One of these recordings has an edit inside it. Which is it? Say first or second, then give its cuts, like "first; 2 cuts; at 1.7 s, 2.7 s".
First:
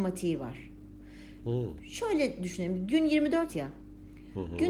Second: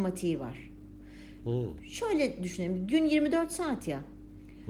first; 1 cut; at 3.5 s